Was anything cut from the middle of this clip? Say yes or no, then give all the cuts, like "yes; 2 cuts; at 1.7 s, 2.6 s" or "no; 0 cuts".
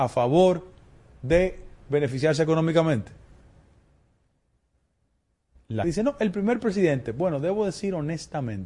yes; 1 cut; at 5.8 s